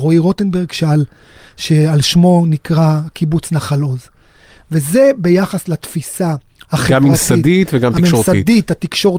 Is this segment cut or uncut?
uncut